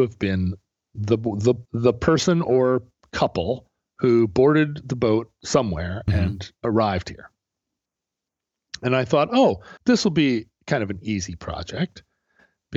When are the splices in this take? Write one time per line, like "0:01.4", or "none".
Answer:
0:01.7
0:03.8
0:06.6
0:09.8

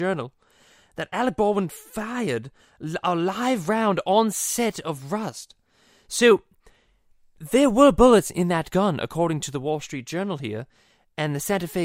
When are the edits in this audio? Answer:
none

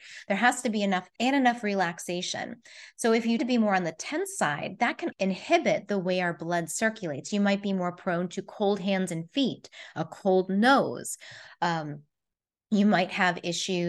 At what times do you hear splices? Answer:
0:01.2
0:03.4
0:05.1

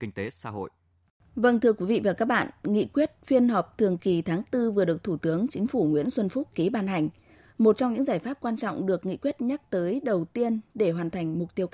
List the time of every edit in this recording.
none

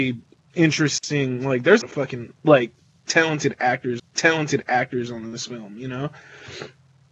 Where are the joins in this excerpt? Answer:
0:01.8
0:02.4
0:04.0

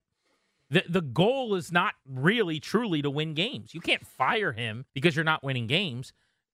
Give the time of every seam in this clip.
0:04.9

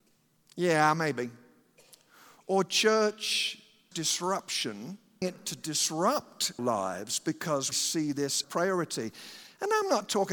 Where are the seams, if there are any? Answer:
0:03.9
0:05.2
0:06.6
0:07.7
0:08.4

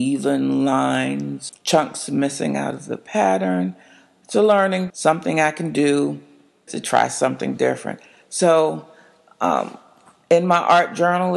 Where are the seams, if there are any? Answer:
0:01.5
0:04.9
0:06.7

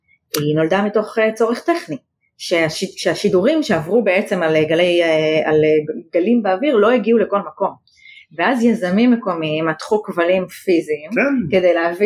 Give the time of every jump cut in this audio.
none

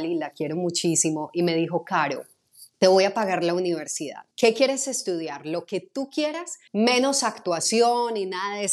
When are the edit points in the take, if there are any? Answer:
0:02.7
0:04.3
0:06.7

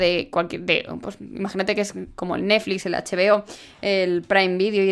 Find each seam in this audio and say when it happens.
none

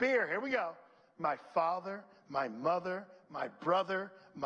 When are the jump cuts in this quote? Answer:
none

